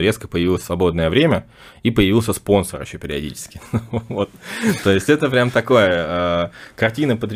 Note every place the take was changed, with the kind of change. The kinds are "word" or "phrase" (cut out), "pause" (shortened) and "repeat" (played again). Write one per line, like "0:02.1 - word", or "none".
none